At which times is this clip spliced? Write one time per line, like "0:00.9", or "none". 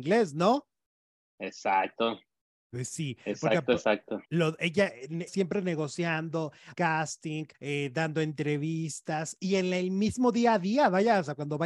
0:04.2
0:05.3
0:06.7
0:07.5